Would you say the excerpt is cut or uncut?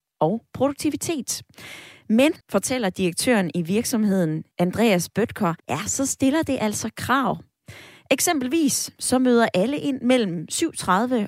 cut